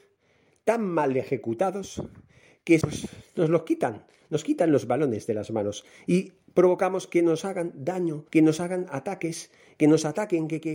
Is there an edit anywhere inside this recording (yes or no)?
yes